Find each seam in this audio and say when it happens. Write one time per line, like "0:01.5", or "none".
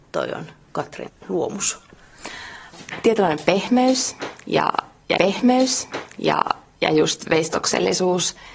0:01.1
0:05.2